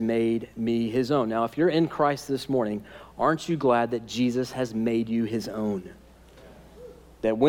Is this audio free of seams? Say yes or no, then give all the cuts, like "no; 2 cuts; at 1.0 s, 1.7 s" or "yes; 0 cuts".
yes; 0 cuts